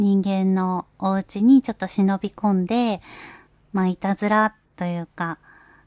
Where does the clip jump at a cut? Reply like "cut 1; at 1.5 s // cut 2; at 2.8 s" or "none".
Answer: cut 1; at 4.7 s